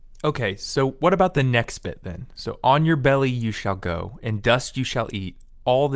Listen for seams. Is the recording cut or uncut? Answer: uncut